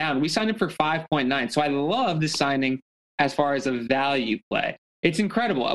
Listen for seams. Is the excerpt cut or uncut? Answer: uncut